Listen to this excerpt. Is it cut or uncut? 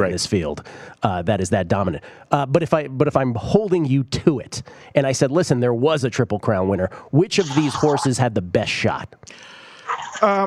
uncut